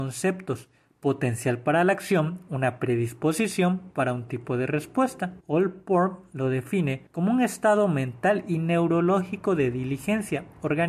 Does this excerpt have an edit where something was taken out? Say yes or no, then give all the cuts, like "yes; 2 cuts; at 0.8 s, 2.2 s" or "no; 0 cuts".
yes; 2 cuts; at 5.4 s, 7.1 s